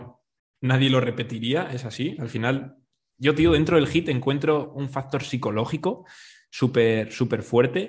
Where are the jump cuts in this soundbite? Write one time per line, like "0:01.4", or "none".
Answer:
none